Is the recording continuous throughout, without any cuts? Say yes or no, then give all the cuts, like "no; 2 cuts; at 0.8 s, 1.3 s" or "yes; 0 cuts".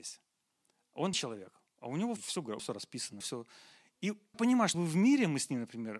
no; 6 cuts; at 1.1 s, 2.2 s, 2.6 s, 3.2 s, 4.3 s, 4.7 s